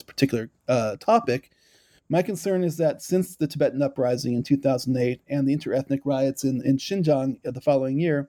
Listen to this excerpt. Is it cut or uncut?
uncut